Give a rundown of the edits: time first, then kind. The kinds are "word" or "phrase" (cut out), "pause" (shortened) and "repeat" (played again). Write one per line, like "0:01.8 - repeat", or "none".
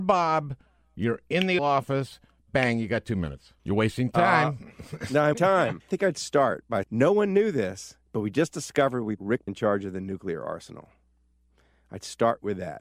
0:01.6 - word
0:03.6 - pause
0:05.3 - word
0:05.8 - word
0:06.8 - word
0:08.1 - pause
0:09.2 - word
0:09.5 - word